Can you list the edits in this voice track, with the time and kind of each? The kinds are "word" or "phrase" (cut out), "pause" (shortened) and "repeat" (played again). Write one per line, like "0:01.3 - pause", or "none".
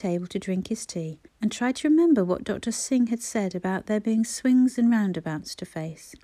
0:01.3 - pause

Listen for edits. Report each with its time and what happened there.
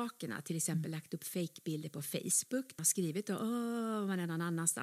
0:02.8 - word

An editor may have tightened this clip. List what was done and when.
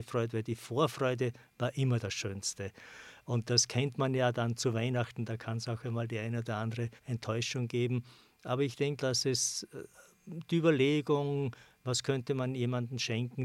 0:07.0 - pause
0:09.0 - word

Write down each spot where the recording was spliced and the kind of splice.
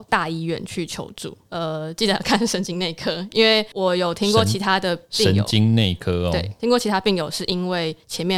0:06.6 - word

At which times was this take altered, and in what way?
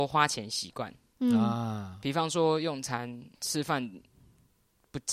0:03.3 - pause

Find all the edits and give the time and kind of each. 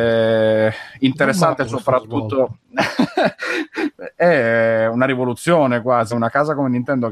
0:06.1 - word

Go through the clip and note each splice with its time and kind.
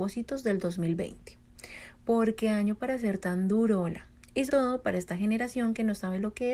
0:04.5 - word

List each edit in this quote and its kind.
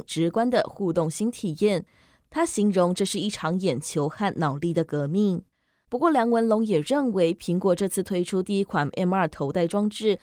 none

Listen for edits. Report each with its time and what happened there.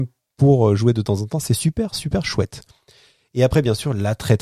none

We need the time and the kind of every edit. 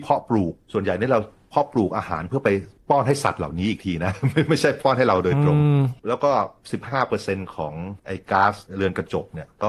0:06.0 - pause
0:08.0 - pause
0:08.7 - pause

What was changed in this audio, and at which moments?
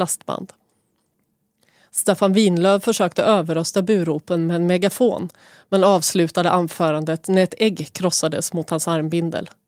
none

